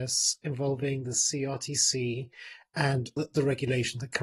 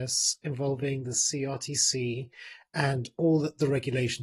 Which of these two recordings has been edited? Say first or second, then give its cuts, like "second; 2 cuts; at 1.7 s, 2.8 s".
first; 1 cut; at 3.2 s